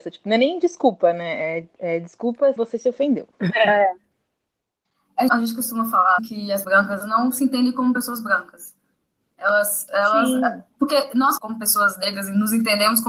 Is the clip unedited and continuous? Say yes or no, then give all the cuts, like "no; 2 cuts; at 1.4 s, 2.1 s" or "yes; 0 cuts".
no; 6 cuts; at 2.6 s, 5.3 s, 6.2 s, 6.6 s, 7.0 s, 11.4 s